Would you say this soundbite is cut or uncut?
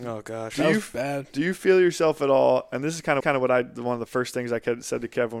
cut